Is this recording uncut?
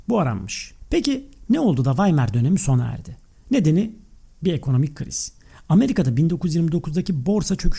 yes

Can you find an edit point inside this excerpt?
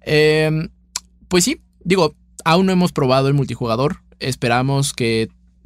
no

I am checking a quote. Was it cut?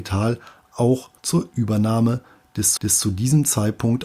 yes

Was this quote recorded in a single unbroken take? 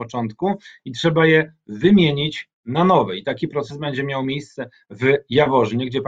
yes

